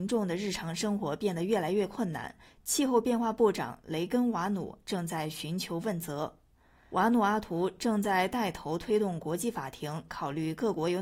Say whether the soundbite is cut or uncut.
uncut